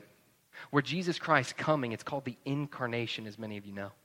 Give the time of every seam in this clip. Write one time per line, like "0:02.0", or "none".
none